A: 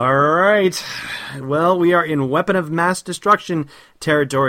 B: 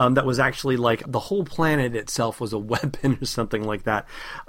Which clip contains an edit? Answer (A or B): B